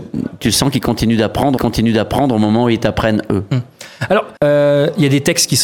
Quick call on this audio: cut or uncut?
cut